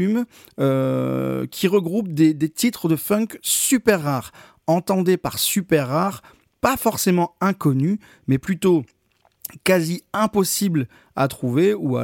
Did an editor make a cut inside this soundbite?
no; 0 cuts

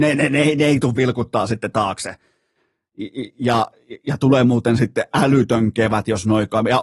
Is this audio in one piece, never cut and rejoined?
yes; 0 cuts

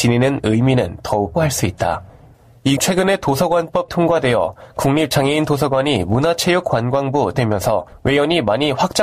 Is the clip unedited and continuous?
no; 4 cuts; at 1.3 s, 2.8 s, 3.9 s, 7.3 s

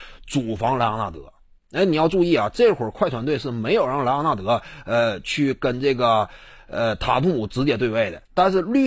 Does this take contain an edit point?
no; 0 cuts

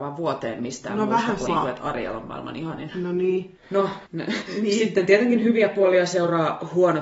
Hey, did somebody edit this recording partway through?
yes; 1 cut; at 1.5 s

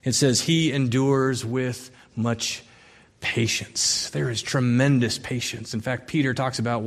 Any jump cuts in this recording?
no; 0 cuts

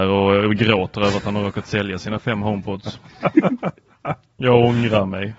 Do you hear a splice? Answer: no; 0 cuts

